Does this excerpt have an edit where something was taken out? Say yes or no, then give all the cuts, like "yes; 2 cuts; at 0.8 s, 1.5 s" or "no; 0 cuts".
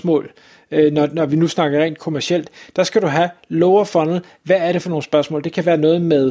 no; 0 cuts